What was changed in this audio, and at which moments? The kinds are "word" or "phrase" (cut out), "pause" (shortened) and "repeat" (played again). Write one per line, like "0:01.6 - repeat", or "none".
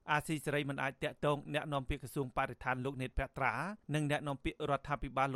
0:03.8 - pause